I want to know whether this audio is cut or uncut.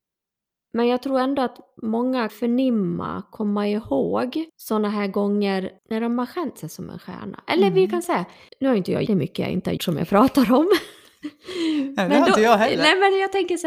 cut